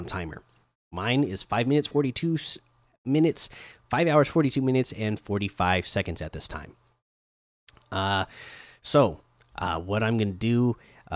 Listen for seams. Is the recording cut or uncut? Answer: uncut